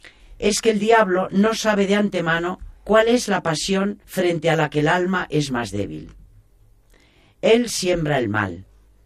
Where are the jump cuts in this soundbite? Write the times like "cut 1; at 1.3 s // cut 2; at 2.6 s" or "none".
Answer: cut 1; at 2.8 s // cut 2; at 4.0 s